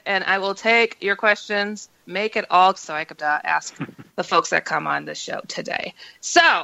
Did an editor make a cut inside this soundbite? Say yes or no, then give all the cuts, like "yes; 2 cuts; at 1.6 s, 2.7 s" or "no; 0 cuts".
yes; 4 cuts; at 2.0 s, 2.7 s, 3.2 s, 4.1 s